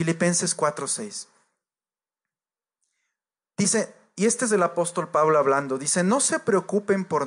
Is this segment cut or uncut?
uncut